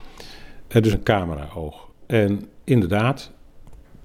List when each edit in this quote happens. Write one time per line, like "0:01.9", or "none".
0:00.9